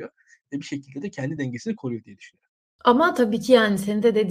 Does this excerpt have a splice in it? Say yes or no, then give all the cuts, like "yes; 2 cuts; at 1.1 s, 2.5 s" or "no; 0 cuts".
no; 0 cuts